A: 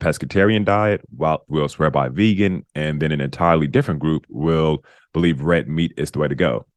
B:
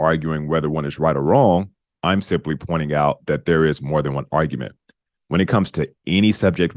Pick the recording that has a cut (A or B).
A